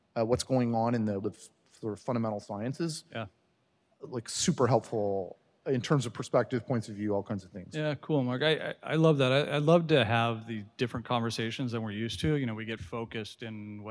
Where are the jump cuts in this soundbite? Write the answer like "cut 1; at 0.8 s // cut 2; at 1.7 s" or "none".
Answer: cut 1; at 1.2 s // cut 2; at 12.8 s